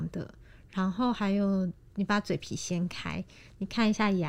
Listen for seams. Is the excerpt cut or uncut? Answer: uncut